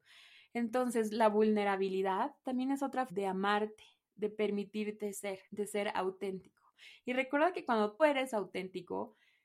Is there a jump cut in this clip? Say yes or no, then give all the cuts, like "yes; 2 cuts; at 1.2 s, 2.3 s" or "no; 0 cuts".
yes; 3 cuts; at 3.1 s, 5.5 s, 8.0 s